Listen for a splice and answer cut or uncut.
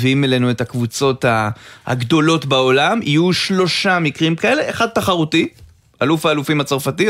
uncut